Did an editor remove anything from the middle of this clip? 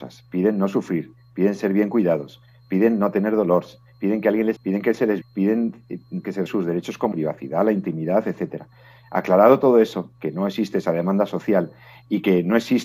yes; 4 cuts; at 4.6 s, 5.2 s, 6.5 s, 7.1 s

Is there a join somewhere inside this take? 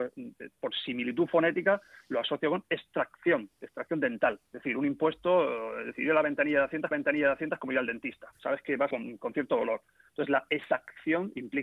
yes; 4 cuts; at 4.5 s, 6.9 s, 8.3 s, 8.9 s

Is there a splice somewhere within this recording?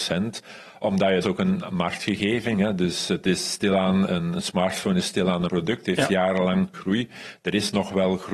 yes; 4 cuts; at 1.2 s, 4.1 s, 5.5 s, 6.7 s

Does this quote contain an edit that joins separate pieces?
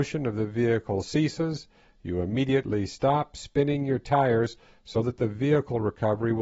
no; 0 cuts

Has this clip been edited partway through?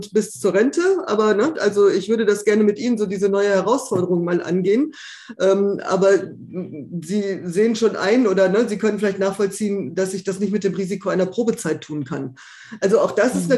no; 0 cuts

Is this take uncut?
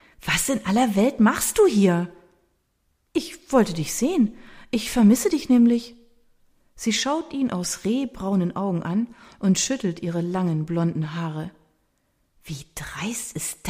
yes; 0 cuts

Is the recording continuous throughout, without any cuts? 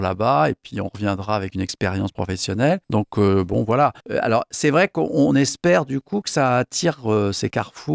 no; 2 cuts; at 2.8 s, 4.0 s

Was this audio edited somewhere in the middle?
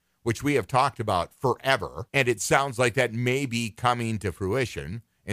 yes; 1 cut; at 2.1 s

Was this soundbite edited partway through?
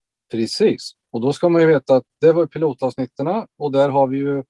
no; 0 cuts

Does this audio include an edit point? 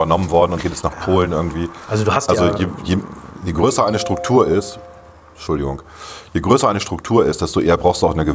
no; 0 cuts

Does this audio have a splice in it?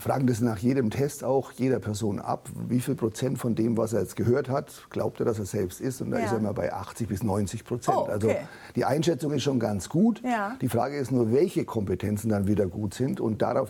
no; 0 cuts

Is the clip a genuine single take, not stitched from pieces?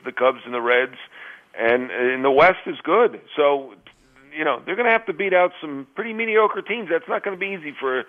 yes; 0 cuts

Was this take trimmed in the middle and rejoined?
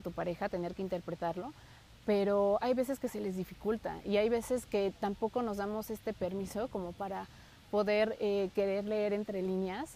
no; 0 cuts

